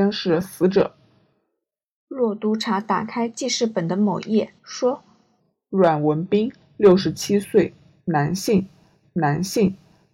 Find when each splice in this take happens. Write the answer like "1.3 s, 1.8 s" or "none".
4.6 s, 9.0 s